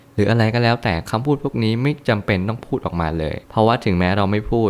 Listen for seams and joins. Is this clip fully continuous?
no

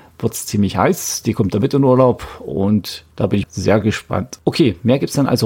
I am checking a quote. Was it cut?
yes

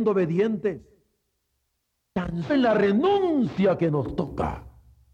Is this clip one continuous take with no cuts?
no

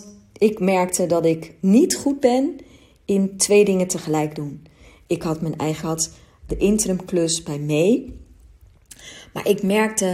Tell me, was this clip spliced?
yes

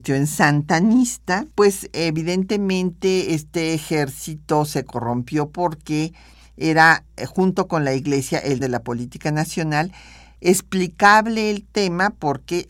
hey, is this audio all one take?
no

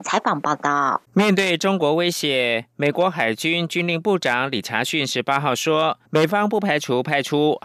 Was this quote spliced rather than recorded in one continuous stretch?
yes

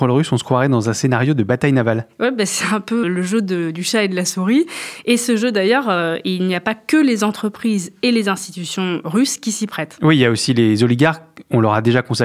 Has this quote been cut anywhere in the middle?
yes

